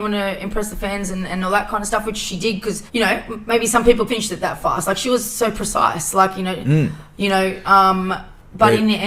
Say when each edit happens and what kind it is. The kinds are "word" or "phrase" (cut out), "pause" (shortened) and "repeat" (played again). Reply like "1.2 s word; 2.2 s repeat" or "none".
2.9 s pause; 4.1 s word